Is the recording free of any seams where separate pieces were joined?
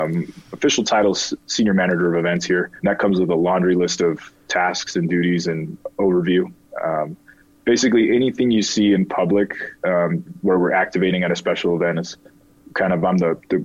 no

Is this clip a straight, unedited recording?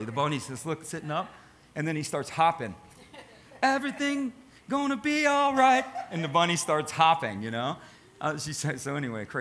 yes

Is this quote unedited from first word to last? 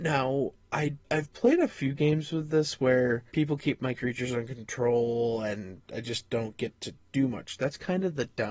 no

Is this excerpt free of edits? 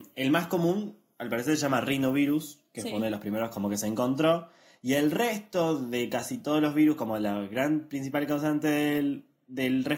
yes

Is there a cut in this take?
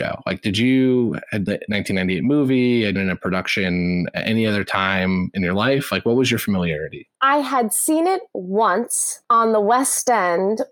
yes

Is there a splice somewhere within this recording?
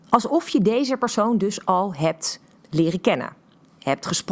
yes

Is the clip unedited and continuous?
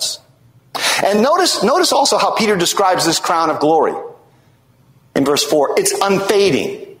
yes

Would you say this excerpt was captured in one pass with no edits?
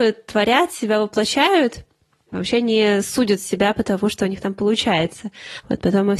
yes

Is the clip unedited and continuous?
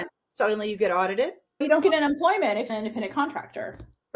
no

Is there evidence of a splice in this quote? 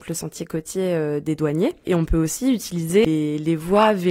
no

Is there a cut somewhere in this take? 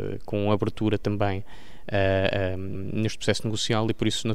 yes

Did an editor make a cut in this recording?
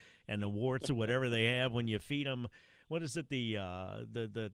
no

